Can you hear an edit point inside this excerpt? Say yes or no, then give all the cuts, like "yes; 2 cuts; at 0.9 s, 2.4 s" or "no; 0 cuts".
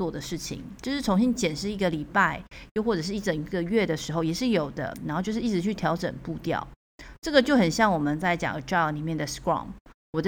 no; 0 cuts